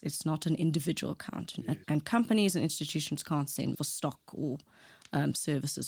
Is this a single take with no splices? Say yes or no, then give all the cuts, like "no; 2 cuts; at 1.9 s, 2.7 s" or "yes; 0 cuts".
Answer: no; 2 cuts; at 1.8 s, 3.7 s